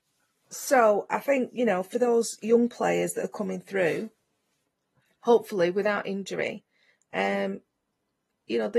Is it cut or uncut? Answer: uncut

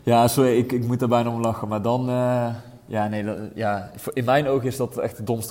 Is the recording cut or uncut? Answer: uncut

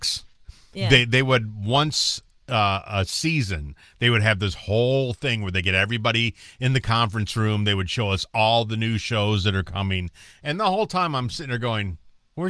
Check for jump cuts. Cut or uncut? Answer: uncut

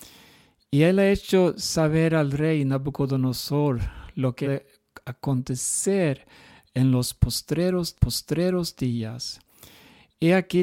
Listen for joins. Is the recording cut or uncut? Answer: cut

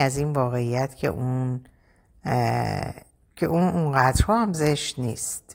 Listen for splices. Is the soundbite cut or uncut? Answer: uncut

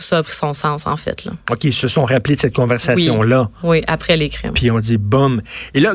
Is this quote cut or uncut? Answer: uncut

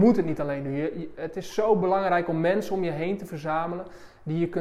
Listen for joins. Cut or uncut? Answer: uncut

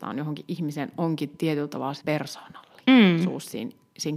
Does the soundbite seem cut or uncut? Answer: cut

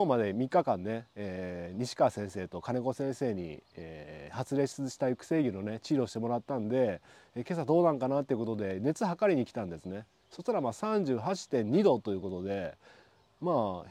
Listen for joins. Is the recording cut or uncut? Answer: uncut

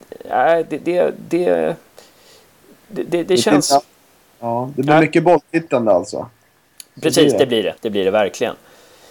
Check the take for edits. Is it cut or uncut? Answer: cut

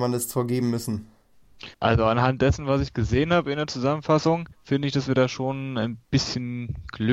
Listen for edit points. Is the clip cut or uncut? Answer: cut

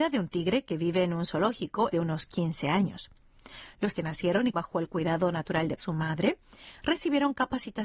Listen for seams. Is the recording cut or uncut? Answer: cut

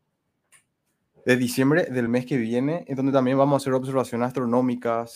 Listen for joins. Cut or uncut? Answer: uncut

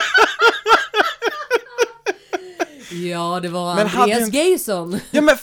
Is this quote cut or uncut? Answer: uncut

